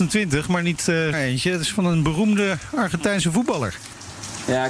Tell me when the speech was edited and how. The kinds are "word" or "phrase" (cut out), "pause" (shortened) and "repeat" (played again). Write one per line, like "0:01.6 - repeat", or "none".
0:01.1 - word

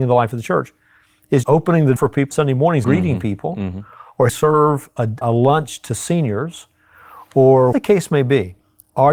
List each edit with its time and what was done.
0:01.4 - word
0:02.0 - word
0:02.3 - word
0:02.8 - word
0:04.3 - word
0:05.2 - word
0:07.7 - word

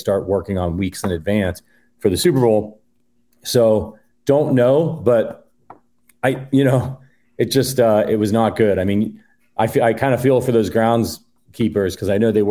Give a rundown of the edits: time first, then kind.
none

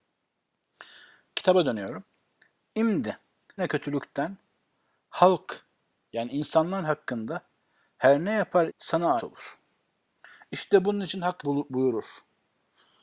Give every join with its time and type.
0:03.6 - word
0:08.7 - word
0:09.2 - word
0:11.4 - word

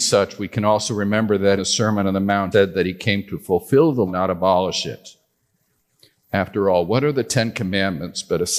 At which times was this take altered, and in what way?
0:01.6 - word
0:02.5 - word
0:04.1 - word

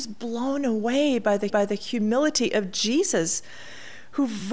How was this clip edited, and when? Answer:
0:01.5 - repeat

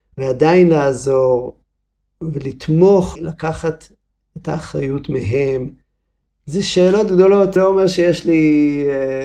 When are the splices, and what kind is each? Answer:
0:03.1 - word
0:05.9 - pause
0:07.6 - word

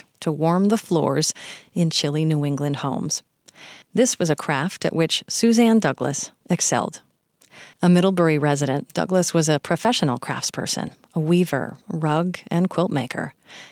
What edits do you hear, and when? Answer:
0:03.8 - pause
0:07.7 - pause

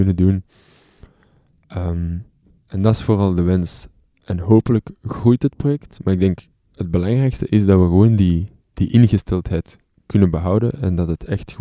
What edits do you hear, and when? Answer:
none

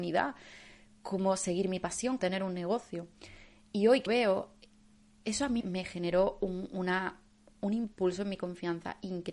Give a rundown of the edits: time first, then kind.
0:02.2 - word
0:04.1 - word
0:05.6 - word

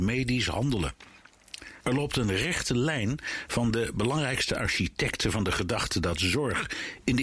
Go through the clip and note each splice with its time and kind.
0:01.8 - pause

